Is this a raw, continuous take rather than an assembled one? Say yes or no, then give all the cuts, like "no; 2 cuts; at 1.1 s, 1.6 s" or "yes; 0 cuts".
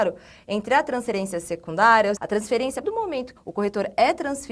no; 3 cuts; at 2.2 s, 2.8 s, 3.4 s